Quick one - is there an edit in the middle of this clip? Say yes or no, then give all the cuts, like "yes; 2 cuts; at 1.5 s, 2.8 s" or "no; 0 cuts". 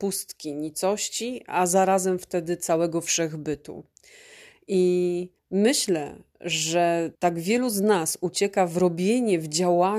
yes; 2 cuts; at 5.4 s, 7.1 s